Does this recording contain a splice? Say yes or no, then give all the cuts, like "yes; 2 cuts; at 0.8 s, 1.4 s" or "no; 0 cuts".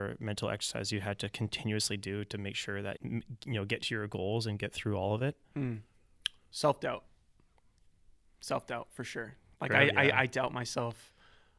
yes; 1 cut; at 3.0 s